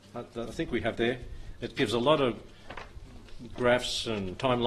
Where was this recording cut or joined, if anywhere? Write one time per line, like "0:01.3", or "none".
0:00.9